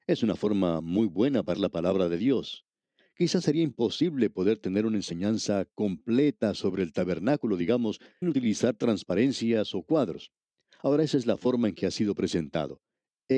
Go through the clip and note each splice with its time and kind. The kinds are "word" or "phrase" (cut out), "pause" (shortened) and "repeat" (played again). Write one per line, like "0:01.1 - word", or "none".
0:01.5 - word
0:08.2 - word